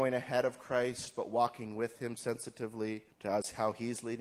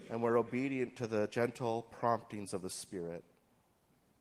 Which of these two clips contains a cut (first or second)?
first